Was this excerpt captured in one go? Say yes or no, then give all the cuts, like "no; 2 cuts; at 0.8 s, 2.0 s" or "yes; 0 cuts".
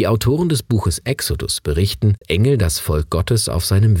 no; 1 cut; at 2.2 s